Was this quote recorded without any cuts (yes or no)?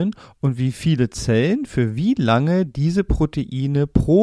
yes